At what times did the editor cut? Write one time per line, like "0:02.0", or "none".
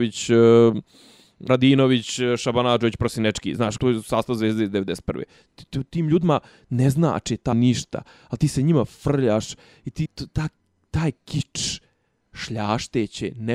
0:01.5
0:03.8
0:07.5
0:10.1
0:12.3